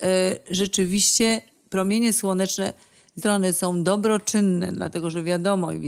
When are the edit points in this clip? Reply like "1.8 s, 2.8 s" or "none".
3.2 s

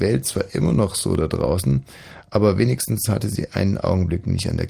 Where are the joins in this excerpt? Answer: none

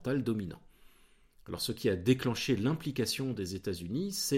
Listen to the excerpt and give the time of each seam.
none

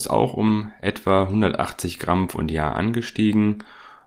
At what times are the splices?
2.3 s

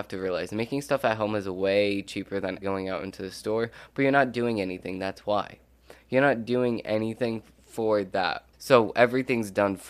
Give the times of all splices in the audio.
2.6 s, 8.5 s

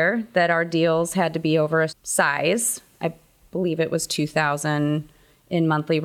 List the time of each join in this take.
1.9 s

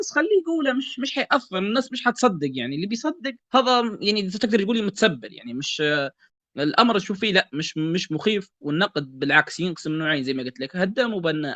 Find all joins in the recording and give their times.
3.4 s

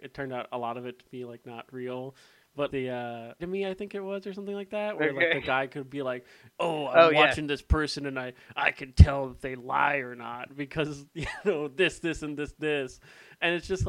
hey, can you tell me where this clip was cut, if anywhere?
2.7 s, 3.4 s

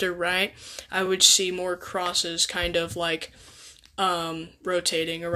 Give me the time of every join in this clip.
none

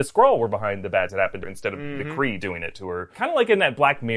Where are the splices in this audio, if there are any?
1.1 s, 1.4 s

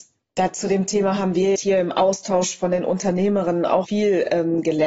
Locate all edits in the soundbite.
1.5 s, 3.8 s

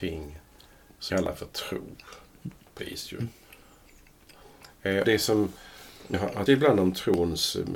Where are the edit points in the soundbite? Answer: 1.1 s, 2.8 s, 5.0 s, 6.1 s, 6.5 s

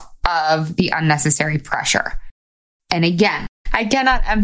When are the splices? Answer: none

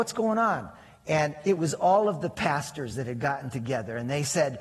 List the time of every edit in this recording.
none

